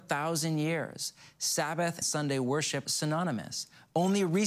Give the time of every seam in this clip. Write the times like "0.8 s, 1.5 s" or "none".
2.0 s, 2.8 s

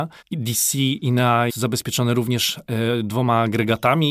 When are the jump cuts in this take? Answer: 1.5 s

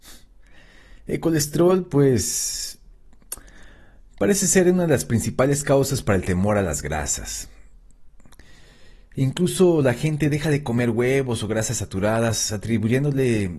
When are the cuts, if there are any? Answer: none

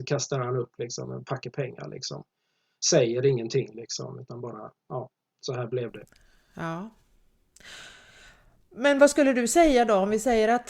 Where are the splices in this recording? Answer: none

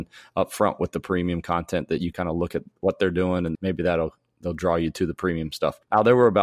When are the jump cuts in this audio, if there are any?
2.1 s, 3.5 s

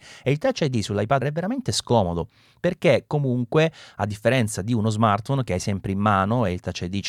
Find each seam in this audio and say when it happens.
1.2 s

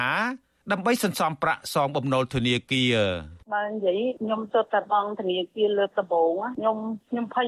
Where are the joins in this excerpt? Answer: 3.4 s

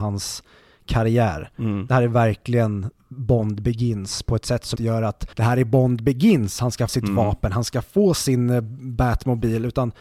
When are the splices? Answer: 4.8 s, 5.3 s, 6.9 s

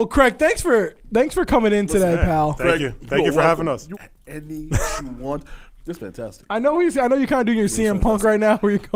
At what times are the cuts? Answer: 3.9 s, 5.0 s, 6.0 s

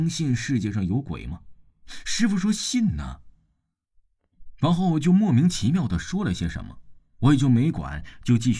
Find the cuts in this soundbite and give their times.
none

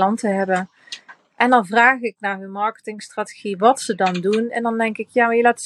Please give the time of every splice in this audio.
none

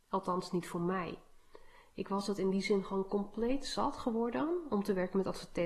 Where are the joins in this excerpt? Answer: none

